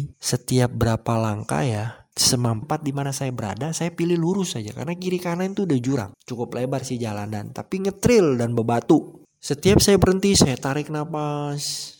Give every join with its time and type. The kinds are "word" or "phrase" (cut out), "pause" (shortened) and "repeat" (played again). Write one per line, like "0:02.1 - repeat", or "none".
0:02.6 - phrase

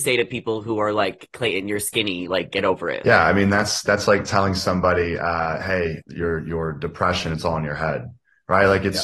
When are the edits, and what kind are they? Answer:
0:06.0 - word

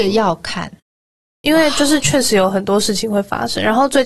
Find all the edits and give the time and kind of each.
0:01.3 - word

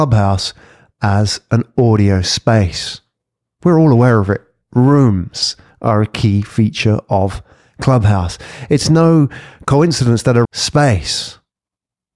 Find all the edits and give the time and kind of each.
0:10.4 - phrase

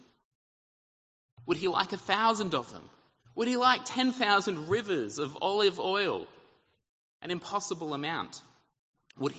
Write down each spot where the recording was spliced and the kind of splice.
none

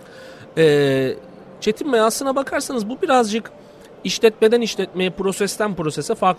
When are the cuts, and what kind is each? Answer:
none

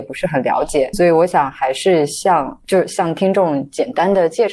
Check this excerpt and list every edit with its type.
0:00.9 - word

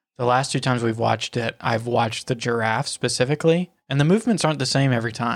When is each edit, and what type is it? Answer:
none

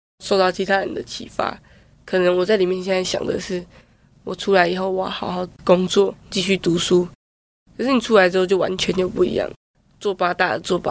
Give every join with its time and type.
0:06.2 - phrase

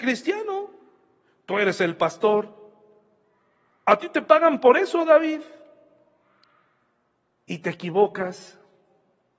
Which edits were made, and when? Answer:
none

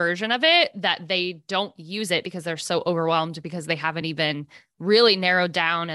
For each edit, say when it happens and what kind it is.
none

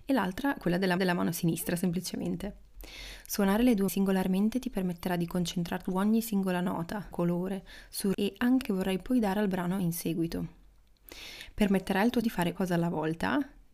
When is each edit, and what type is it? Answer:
0:01.0 - repeat
0:03.9 - word
0:05.9 - word
0:07.1 - phrase
0:08.1 - word
0:08.6 - word
0:12.2 - word
0:12.6 - word

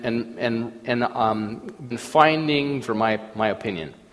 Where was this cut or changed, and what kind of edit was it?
0:01.9 - word
0:02.8 - word

